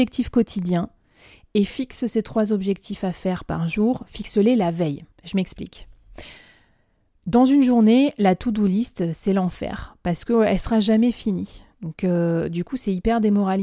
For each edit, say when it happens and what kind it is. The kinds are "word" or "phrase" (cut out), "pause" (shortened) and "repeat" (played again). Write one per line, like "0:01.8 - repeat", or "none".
0:05.1 - pause